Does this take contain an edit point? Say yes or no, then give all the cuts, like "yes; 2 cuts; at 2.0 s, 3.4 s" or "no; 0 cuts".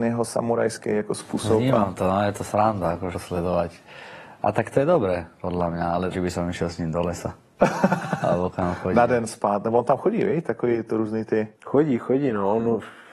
yes; 3 cuts; at 3.1 s, 6.1 s, 11.5 s